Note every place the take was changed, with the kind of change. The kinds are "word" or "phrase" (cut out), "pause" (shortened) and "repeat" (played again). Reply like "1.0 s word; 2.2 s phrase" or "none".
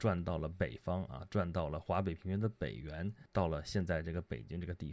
3.3 s pause